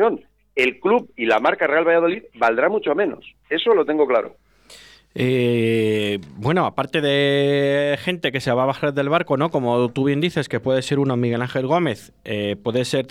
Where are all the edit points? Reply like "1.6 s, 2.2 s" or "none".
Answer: none